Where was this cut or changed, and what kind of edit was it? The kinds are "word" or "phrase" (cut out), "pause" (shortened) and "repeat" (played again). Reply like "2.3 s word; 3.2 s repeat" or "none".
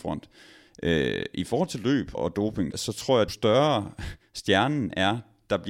2.1 s word; 2.7 s word; 3.3 s word